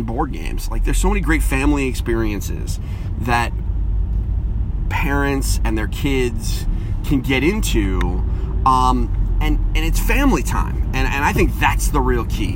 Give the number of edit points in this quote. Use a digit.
0